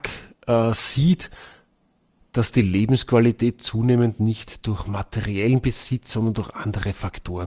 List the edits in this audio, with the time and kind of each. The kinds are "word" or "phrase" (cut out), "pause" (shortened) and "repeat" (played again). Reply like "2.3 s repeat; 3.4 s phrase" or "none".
none

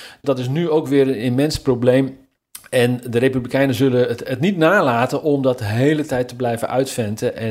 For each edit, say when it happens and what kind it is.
none

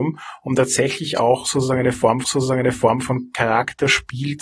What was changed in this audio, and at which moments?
2.2 s repeat

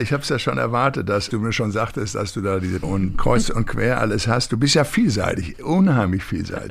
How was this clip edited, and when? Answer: 1.3 s phrase; 2.8 s phrase; 3.1 s word

